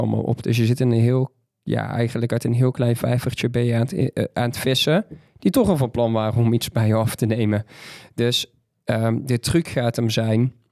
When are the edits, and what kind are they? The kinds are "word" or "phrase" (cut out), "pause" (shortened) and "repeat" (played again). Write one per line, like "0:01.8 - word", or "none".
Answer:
none